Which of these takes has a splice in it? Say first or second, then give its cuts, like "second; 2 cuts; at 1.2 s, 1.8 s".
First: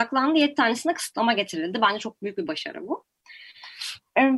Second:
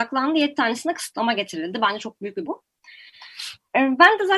second; 1 cut; at 2.5 s